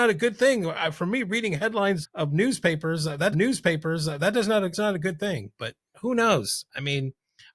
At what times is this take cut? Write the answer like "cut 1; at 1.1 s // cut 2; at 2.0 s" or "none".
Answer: cut 1; at 2.0 s // cut 2; at 3.3 s // cut 3; at 4.7 s